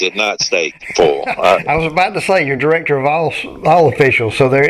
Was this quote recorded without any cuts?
yes; 0 cuts

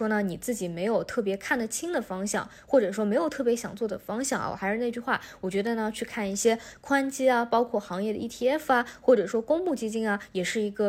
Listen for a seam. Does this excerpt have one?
no; 0 cuts

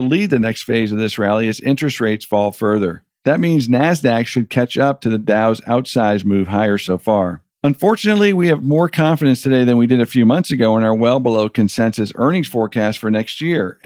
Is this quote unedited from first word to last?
no; 1 cut; at 7.5 s

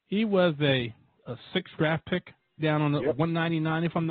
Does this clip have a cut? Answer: yes; 3 cuts; at 1.2 s, 1.8 s, 2.6 s

